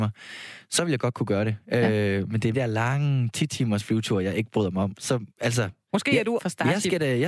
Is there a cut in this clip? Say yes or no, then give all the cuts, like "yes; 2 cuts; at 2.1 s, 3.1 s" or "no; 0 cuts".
yes; 3 cuts; at 2.5 s, 5.3 s, 6.4 s